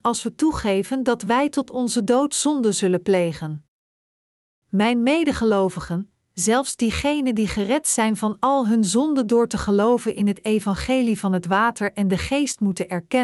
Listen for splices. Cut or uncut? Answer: uncut